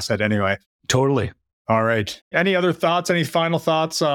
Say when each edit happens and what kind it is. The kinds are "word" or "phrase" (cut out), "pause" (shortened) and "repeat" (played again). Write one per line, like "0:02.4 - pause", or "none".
none